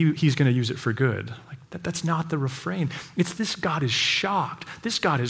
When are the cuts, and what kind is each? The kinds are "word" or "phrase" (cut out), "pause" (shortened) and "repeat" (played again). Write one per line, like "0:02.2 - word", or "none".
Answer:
0:01.6 - pause